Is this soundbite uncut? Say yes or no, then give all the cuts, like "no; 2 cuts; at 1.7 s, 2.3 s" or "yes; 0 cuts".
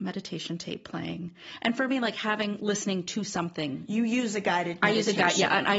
yes; 0 cuts